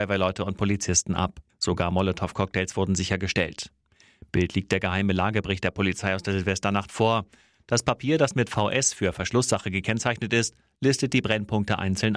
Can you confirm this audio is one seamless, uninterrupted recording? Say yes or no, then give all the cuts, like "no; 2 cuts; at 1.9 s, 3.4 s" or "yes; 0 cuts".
no; 1 cut; at 1.5 s